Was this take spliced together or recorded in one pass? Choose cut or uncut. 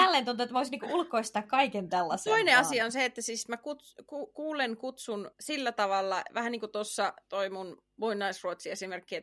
cut